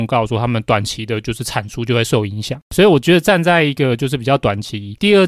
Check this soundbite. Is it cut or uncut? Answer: uncut